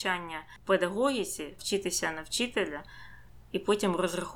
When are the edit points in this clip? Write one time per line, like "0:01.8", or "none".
0:01.6